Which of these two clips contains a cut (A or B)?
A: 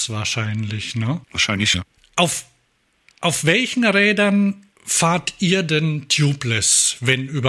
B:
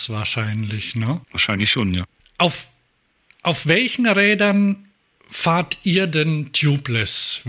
A